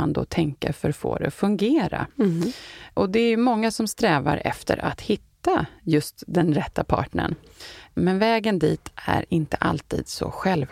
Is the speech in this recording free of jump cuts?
no; 1 cut; at 2.1 s

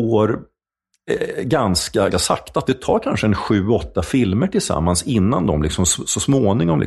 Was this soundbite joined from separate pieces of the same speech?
yes; 1 cut; at 2.1 s

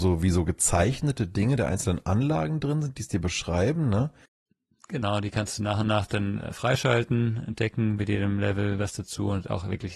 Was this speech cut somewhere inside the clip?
no; 0 cuts

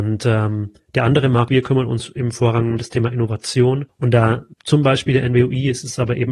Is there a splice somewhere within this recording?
yes; 3 cuts; at 1.5 s, 3.9 s, 4.5 s

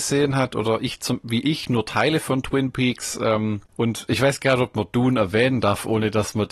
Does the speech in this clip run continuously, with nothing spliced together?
yes; 0 cuts

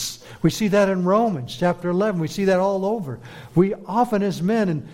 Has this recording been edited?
no; 0 cuts

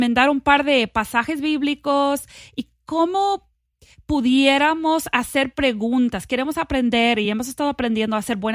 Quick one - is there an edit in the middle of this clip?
no; 0 cuts

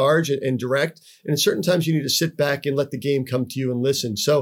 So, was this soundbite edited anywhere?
no; 0 cuts

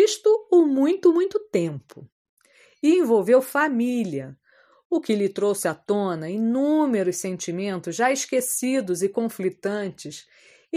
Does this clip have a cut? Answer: no; 0 cuts

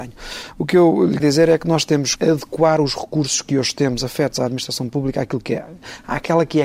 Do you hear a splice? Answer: yes; 2 cuts; at 1.2 s, 2.2 s

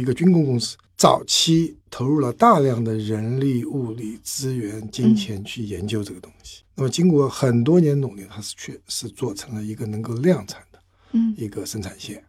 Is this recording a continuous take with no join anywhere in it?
no; 1 cut; at 1.8 s

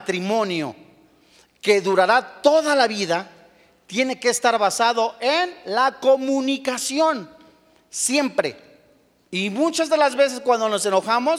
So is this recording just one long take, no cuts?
yes; 0 cuts

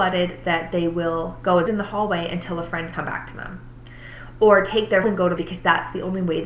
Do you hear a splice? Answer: yes; 4 cuts; at 1.7 s, 2.9 s, 5.0 s, 5.4 s

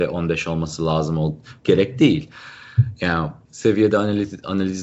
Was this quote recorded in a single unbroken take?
no; 2 cuts; at 1.6 s, 3.4 s

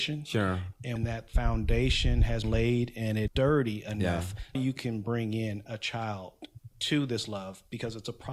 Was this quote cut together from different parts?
yes; 4 cuts; at 1.0 s, 2.4 s, 3.3 s, 4.5 s

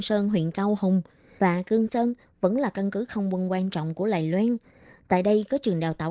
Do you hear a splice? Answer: no; 0 cuts

